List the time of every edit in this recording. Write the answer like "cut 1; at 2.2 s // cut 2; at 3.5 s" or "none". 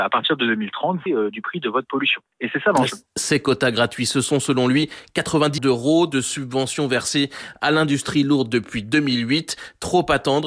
cut 1; at 1.1 s // cut 2; at 3.1 s // cut 3; at 5.6 s